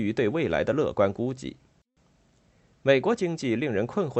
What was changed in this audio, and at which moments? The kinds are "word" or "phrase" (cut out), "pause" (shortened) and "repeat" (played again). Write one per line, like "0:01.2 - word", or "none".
none